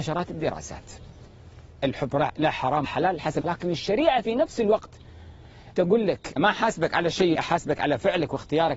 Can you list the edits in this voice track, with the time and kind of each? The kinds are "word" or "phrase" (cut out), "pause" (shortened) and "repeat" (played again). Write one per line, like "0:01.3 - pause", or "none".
0:01.8 - word
0:02.8 - word
0:03.4 - word
0:05.7 - word
0:06.4 - word
0:07.3 - word

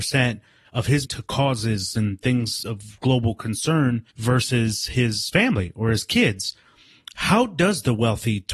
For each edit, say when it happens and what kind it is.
0:01.0 - phrase
0:04.1 - pause

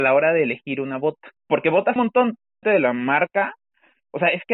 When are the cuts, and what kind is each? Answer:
0:01.4 - pause
0:02.0 - phrase
0:02.6 - phrase

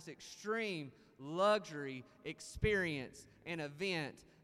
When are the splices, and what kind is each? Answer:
none

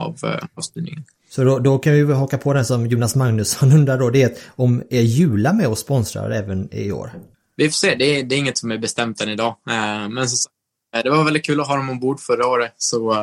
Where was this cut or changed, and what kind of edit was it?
0:07.3 - pause

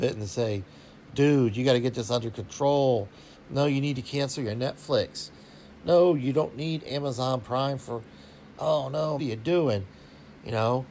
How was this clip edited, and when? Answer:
0:03.3 - pause
0:09.2 - phrase

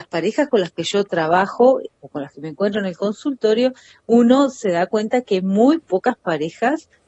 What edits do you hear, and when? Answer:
none

